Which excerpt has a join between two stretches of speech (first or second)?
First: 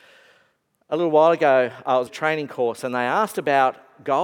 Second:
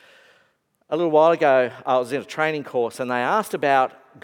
first